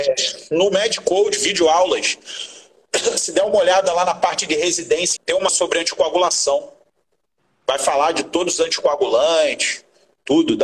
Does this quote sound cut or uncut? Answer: cut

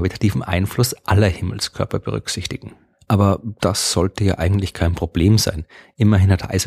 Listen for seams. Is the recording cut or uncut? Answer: uncut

